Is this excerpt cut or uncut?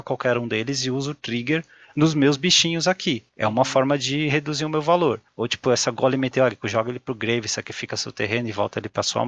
uncut